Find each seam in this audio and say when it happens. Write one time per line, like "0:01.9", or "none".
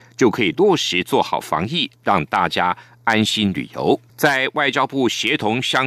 0:04.1